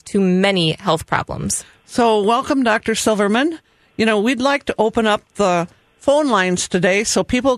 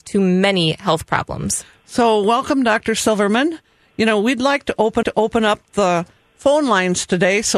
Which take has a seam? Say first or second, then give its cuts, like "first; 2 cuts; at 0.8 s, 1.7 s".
second; 1 cut; at 5.0 s